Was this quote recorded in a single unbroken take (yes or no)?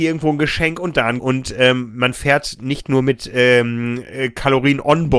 no